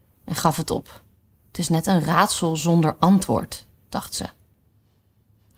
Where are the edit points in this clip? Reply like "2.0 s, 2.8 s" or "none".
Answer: 1.3 s